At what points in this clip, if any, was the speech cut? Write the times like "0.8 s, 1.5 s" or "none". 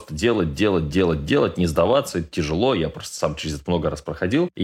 none